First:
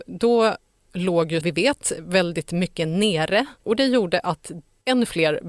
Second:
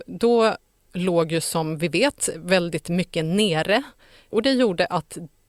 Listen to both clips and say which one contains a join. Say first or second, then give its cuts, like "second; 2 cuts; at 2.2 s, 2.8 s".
first; 2 cuts; at 1.4 s, 3.6 s